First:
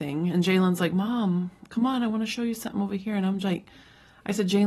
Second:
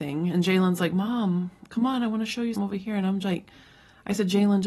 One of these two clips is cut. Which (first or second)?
second